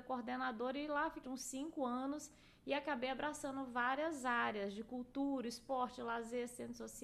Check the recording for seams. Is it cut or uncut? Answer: cut